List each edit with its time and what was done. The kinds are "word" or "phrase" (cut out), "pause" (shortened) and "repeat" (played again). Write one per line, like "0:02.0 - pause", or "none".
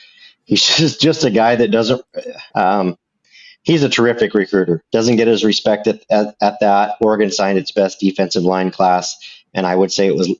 0:02.5 - pause